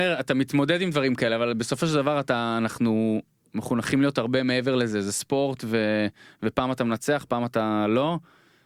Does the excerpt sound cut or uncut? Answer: uncut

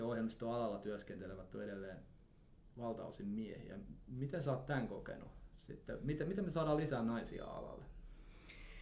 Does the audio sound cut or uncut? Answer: uncut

